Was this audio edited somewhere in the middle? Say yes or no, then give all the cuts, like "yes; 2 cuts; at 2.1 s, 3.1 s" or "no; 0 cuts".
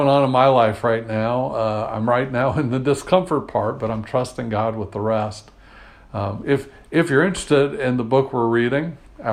no; 0 cuts